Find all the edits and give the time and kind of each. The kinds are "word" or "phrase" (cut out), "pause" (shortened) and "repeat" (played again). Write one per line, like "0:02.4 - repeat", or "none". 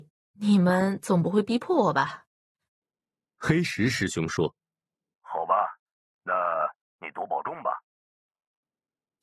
none